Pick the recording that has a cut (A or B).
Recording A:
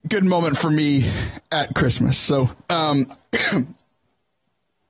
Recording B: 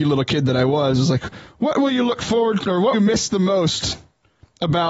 B